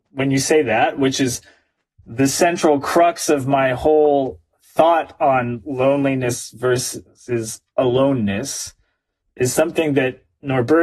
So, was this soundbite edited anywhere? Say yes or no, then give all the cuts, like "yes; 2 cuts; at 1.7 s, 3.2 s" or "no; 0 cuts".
no; 0 cuts